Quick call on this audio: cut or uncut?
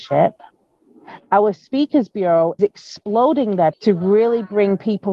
cut